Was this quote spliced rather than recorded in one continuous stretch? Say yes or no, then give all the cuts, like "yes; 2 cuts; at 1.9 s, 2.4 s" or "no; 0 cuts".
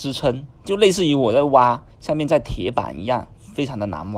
yes; 1 cut; at 1.9 s